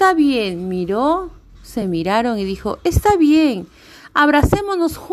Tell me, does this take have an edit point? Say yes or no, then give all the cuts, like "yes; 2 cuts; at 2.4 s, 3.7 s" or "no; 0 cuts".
no; 0 cuts